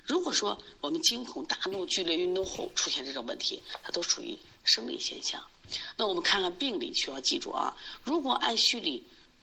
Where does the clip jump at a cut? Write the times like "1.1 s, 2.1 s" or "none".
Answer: none